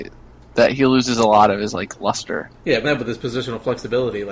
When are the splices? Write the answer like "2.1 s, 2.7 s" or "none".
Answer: 2.5 s, 2.8 s